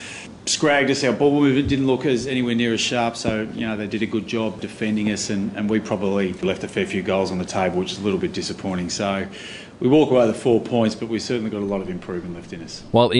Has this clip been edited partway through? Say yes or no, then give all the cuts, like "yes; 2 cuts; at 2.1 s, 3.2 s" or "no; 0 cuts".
no; 0 cuts